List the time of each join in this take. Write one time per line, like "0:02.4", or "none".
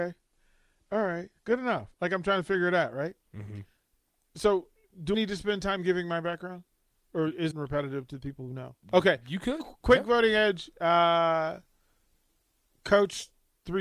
0:01.4
0:01.9
0:03.2
0:05.1
0:07.5
0:08.8